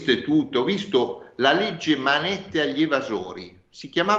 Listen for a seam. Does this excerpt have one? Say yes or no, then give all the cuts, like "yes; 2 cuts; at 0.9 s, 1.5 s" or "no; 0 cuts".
no; 0 cuts